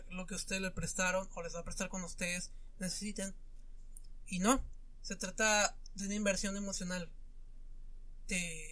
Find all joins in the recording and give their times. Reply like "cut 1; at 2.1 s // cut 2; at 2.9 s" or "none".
none